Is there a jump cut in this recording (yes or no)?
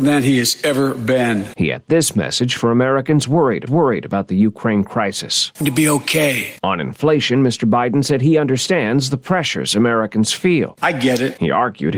yes